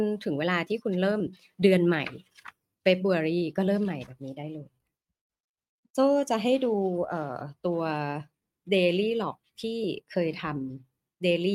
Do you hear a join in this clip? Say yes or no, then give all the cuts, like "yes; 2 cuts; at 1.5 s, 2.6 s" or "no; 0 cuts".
no; 0 cuts